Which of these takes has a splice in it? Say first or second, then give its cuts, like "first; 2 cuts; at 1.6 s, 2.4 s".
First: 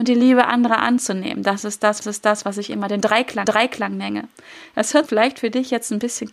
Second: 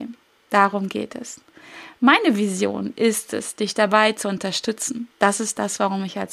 first; 3 cuts; at 2.0 s, 3.5 s, 5.1 s